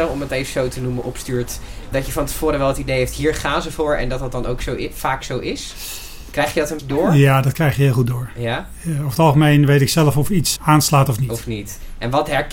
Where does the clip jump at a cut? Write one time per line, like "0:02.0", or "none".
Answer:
0:01.9
0:06.8
0:10.6